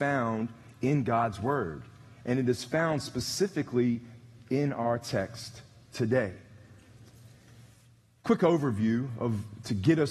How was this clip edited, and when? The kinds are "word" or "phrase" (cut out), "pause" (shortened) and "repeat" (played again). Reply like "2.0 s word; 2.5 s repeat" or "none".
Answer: none